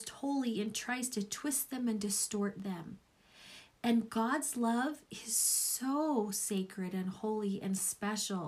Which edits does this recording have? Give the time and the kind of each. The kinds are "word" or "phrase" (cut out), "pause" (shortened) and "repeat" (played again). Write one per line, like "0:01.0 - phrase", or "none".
none